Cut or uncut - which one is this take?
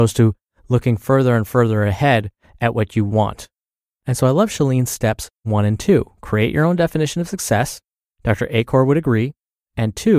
uncut